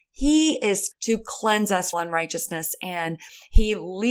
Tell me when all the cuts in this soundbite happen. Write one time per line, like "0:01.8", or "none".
0:00.9
0:01.9

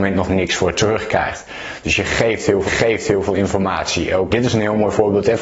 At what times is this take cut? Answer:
0:02.7
0:04.3

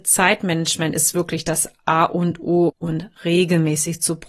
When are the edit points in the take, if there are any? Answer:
0:02.7

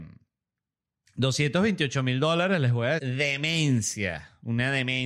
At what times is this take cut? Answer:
0:03.0

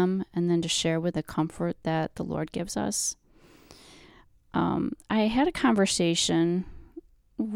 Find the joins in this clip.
0:01.1

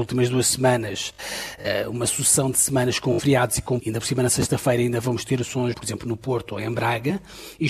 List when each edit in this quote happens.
0:03.8
0:05.7

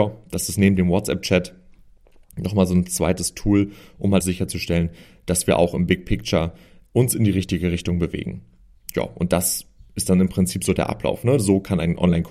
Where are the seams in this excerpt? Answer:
0:04.2

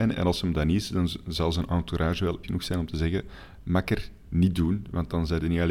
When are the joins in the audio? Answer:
0:02.4

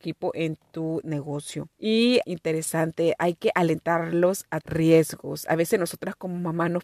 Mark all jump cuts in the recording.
0:02.2
0:04.6

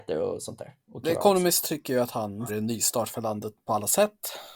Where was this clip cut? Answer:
0:02.5

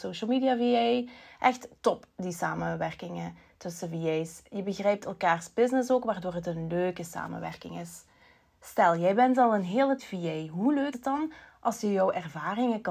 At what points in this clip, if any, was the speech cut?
0:10.0
0:10.9

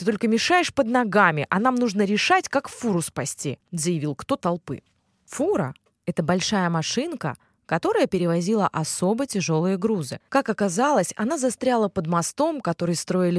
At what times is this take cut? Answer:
0:04.4
0:10.2

